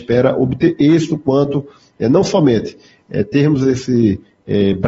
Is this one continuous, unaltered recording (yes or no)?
yes